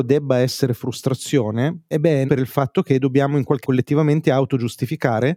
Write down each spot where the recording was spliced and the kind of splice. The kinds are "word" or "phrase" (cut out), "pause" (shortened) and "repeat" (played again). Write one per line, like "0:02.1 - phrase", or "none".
0:01.9 - word
0:02.3 - word
0:03.6 - word